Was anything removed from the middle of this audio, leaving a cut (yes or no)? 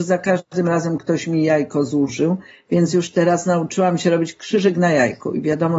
no